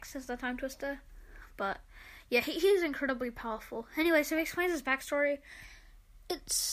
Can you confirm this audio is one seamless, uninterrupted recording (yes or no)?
yes